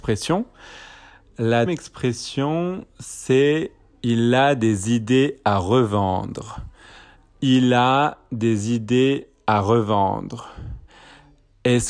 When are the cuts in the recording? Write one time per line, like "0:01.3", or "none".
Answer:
0:01.7